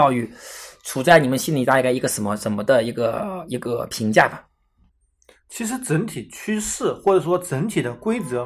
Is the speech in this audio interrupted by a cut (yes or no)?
no